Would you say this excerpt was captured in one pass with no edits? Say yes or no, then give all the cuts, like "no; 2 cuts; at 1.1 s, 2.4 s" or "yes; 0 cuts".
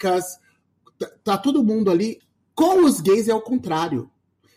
yes; 0 cuts